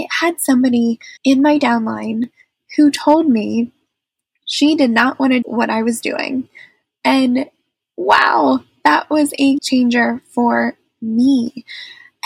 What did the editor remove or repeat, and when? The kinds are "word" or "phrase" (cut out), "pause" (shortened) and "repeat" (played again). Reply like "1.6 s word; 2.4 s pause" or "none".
1.2 s pause; 5.4 s word; 9.6 s word